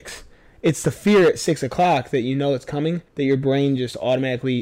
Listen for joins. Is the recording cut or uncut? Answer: cut